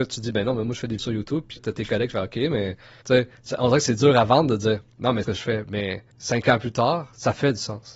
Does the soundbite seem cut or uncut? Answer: cut